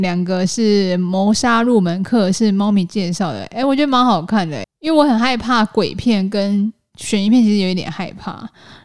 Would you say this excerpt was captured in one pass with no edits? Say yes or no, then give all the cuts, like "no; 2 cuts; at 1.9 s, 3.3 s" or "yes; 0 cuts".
no; 1 cut; at 4.7 s